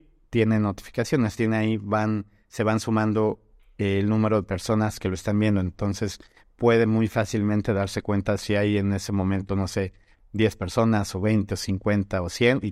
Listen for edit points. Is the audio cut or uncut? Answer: uncut